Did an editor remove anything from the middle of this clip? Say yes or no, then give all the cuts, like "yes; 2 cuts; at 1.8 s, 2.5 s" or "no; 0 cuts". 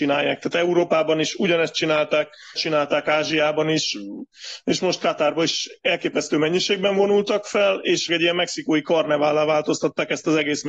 yes; 2 cuts; at 2.6 s, 8.1 s